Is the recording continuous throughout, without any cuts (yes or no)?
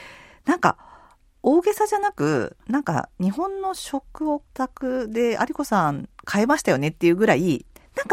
no